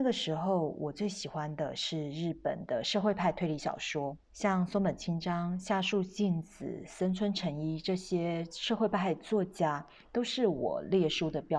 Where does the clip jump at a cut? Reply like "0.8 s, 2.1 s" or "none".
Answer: 4.2 s